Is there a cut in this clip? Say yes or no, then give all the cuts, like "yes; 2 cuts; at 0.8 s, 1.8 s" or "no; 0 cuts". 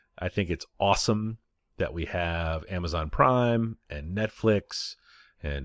no; 0 cuts